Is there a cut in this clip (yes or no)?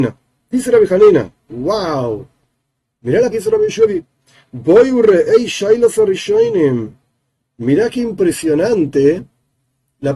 yes